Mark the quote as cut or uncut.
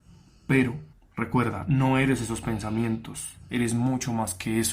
cut